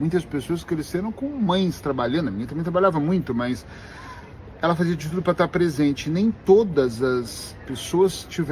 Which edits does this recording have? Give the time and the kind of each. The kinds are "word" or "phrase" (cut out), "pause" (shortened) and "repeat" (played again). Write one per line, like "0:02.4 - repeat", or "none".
none